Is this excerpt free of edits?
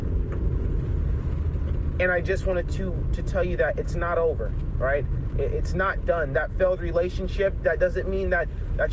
yes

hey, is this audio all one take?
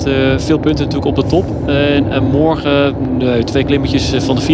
yes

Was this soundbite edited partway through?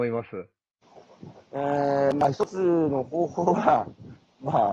yes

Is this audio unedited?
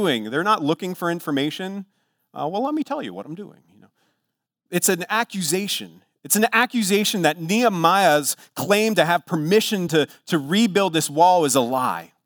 yes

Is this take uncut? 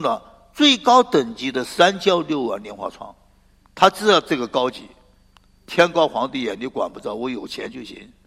yes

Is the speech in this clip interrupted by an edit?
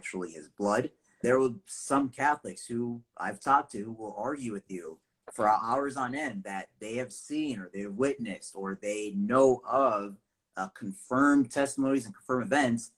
yes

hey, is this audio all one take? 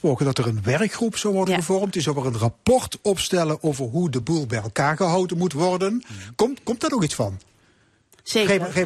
yes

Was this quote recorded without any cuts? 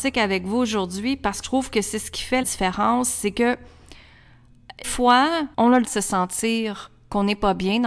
no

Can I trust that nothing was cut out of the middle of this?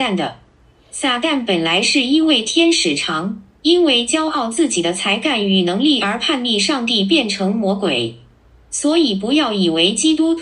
yes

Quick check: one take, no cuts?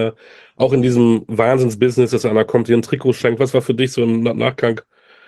yes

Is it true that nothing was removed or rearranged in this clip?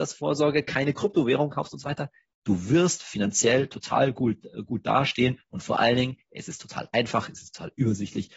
yes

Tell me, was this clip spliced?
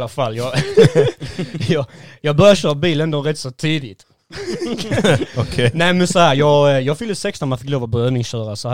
no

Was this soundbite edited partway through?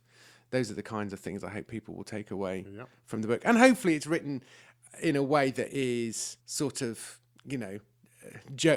yes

